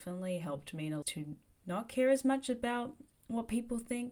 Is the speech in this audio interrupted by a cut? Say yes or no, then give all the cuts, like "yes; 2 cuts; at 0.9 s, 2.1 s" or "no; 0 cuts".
yes; 2 cuts; at 1.0 s, 1.5 s